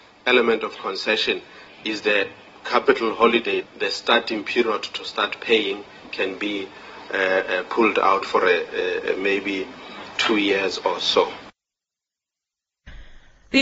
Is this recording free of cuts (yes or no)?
yes